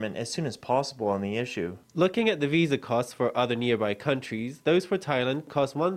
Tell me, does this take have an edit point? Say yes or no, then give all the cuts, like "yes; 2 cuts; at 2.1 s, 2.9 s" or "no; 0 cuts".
no; 0 cuts